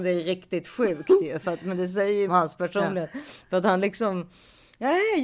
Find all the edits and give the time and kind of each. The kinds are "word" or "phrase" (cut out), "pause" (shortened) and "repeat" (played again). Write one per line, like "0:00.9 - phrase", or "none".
0:02.3 - phrase